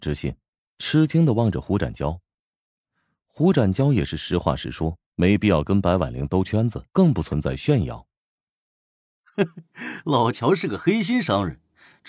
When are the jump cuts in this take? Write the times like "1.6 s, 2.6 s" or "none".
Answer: 5.0 s, 6.9 s